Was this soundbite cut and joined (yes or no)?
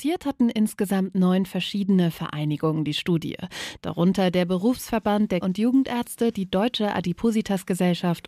yes